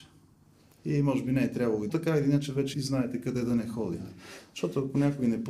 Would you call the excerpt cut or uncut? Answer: cut